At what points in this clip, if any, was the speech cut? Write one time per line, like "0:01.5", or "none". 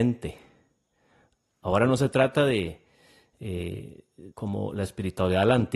0:04.3

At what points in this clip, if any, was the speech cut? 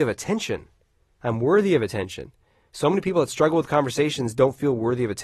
none

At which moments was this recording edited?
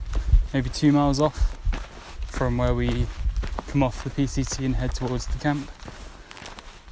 0:05.4

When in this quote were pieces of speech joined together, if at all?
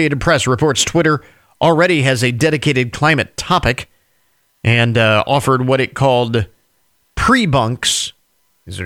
none

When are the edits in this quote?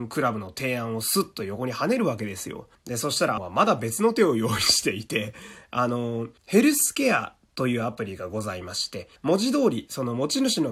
0:02.7
0:03.4
0:06.4
0:09.2

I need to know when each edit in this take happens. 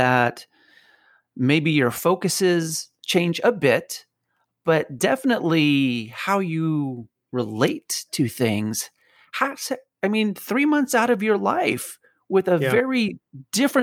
none

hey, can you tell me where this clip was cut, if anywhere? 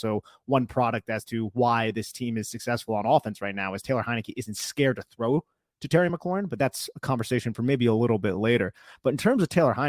none

